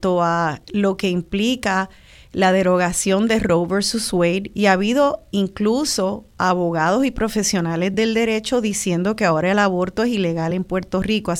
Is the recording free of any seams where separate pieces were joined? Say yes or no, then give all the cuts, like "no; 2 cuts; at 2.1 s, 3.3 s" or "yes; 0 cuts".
yes; 0 cuts